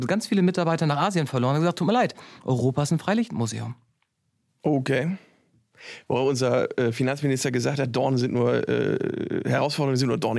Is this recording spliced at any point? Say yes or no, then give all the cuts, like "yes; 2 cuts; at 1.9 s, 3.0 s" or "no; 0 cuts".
no; 0 cuts